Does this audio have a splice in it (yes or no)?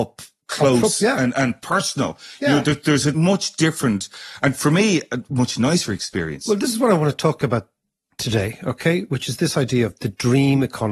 no